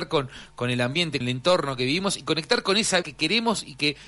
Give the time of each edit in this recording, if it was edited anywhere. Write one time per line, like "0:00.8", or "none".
0:01.2
0:03.0